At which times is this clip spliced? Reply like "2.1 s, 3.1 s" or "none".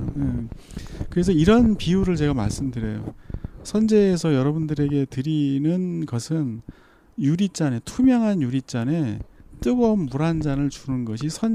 none

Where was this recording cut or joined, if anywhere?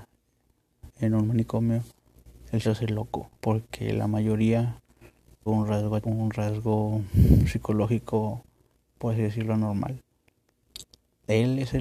0.9 s, 2.6 s, 3.3 s, 5.5 s, 6.0 s, 8.7 s

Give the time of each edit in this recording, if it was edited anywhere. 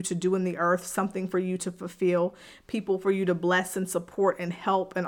none

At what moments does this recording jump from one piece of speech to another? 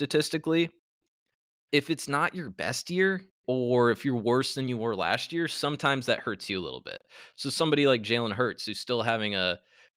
3.4 s

